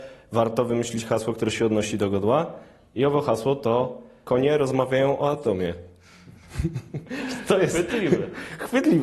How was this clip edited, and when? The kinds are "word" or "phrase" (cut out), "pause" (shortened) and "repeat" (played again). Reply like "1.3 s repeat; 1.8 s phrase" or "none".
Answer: none